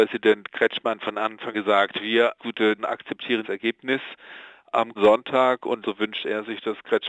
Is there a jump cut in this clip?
yes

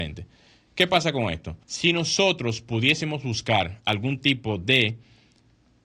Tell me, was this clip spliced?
yes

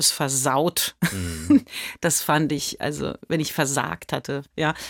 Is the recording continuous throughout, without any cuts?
yes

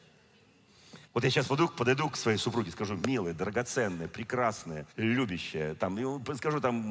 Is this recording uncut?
no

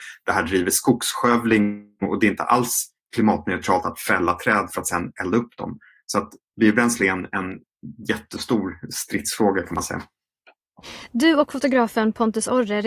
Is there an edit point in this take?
no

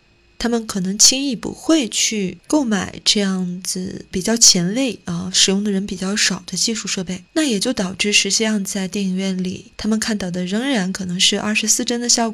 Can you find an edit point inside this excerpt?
yes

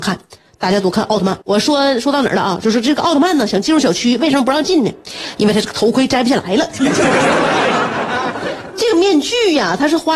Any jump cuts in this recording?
yes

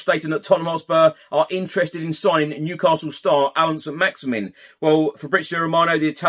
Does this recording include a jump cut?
no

